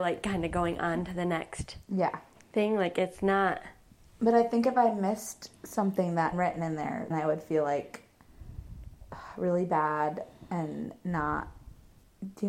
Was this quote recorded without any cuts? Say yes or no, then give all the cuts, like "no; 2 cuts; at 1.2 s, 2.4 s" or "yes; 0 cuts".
no; 2 cuts; at 6.3 s, 7.1 s